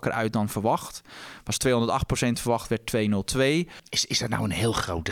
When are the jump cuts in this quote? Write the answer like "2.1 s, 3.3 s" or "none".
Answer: none